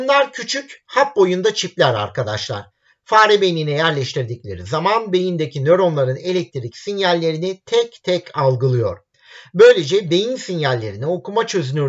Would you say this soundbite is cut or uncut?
uncut